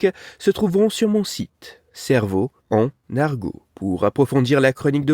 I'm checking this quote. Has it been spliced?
yes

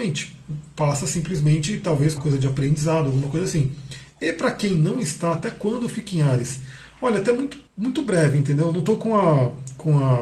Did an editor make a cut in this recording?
yes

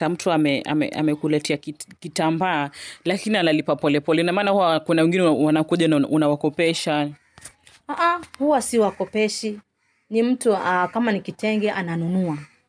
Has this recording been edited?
no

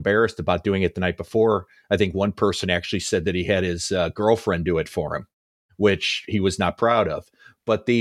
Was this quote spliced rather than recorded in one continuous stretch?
no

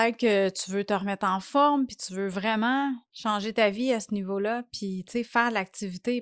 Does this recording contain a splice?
yes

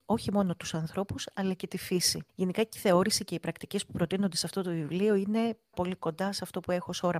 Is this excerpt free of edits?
no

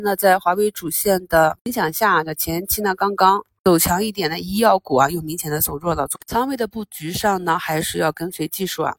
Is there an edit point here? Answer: no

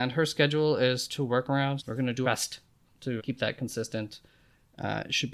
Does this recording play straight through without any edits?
no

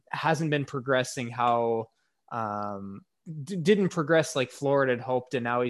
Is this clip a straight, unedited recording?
yes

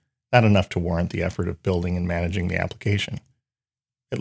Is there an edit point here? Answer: no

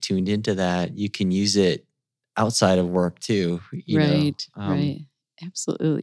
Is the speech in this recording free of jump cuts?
yes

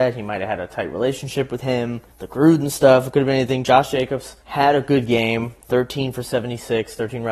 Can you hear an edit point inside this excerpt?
yes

